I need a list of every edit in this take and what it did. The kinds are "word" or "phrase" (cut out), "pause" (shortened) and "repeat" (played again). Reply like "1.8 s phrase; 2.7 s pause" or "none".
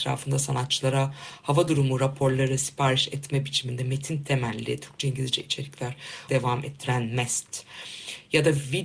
6.3 s word